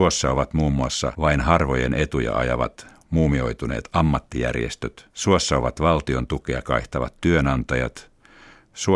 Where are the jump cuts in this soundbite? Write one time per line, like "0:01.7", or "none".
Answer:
0:05.1
0:06.6

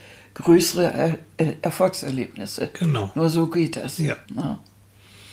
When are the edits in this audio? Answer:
0:04.3

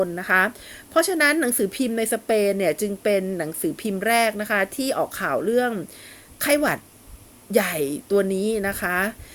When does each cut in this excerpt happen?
none

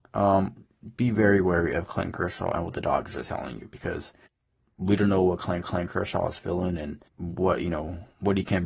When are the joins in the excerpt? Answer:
0:04.3
0:05.6
0:07.1

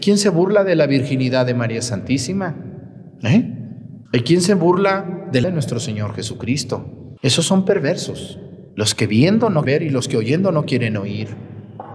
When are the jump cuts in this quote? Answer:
0:04.1
0:05.4
0:07.2
0:08.7
0:09.6

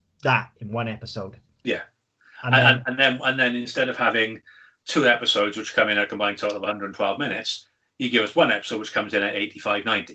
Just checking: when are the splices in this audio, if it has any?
none

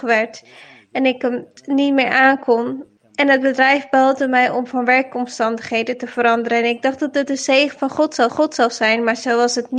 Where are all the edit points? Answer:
0:01.6
0:03.0
0:08.3

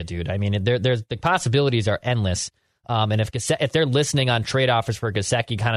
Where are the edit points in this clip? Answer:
none

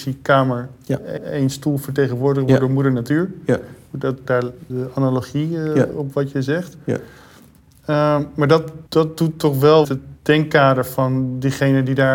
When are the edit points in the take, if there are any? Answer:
0:01.2
0:04.3
0:04.7
0:08.9
0:09.8

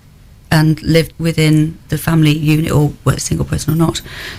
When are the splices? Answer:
0:01.1
0:03.2

